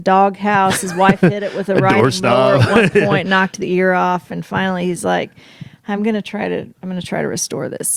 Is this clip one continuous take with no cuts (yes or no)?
yes